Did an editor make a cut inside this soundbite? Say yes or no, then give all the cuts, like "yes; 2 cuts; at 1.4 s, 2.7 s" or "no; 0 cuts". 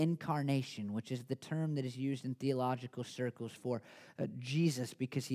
no; 0 cuts